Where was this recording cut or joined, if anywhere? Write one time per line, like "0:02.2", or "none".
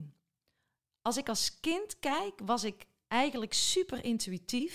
none